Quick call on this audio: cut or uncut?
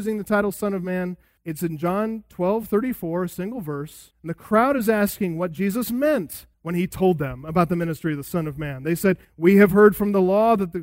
uncut